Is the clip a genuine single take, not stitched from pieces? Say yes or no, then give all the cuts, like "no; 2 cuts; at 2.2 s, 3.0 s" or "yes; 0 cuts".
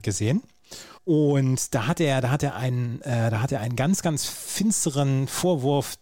no; 1 cut; at 1.0 s